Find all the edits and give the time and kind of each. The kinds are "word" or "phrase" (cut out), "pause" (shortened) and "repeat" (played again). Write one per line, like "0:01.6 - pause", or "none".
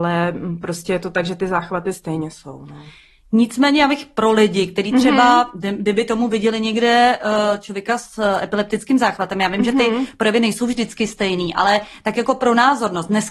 none